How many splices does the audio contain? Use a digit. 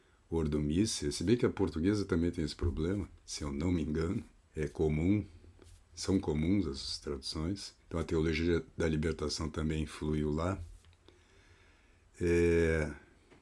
3